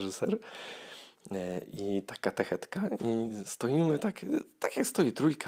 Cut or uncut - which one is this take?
uncut